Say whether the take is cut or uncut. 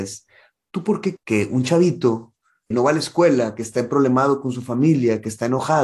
cut